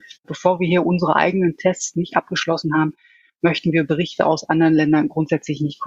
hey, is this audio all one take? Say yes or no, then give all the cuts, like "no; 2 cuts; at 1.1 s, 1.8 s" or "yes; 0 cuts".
yes; 0 cuts